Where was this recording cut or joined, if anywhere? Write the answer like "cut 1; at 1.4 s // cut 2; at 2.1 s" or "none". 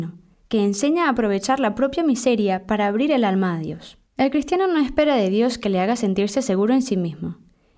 cut 1; at 4.1 s